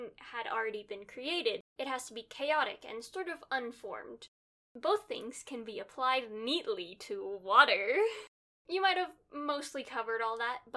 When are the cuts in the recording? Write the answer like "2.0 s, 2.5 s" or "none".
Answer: none